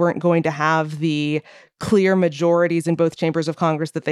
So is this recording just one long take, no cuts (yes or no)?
yes